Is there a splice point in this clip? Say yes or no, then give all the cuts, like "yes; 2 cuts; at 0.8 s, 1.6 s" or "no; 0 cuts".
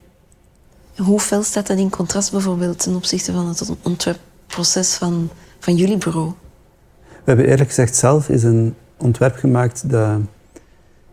no; 0 cuts